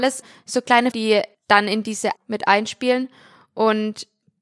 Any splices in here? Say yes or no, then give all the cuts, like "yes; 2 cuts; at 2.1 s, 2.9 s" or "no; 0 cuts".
yes; 2 cuts; at 0.9 s, 2.2 s